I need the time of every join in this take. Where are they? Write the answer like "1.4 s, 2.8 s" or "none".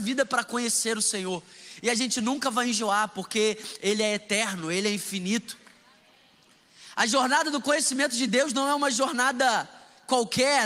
none